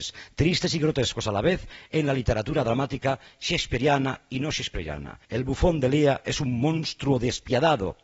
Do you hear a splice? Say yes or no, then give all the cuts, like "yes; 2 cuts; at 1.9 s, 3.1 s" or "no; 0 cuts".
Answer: yes; 1 cut; at 5.2 s